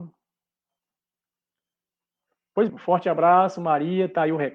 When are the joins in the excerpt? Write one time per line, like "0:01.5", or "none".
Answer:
0:02.7